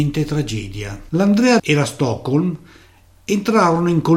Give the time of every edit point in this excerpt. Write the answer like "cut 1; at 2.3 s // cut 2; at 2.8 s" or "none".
cut 1; at 1.6 s